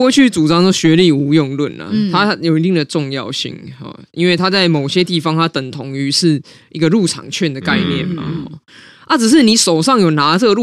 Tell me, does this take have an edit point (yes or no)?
no